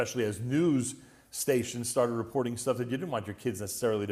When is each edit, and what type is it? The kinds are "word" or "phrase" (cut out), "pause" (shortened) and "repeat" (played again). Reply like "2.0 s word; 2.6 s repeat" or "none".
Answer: none